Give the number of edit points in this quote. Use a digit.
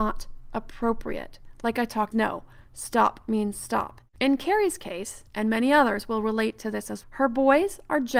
3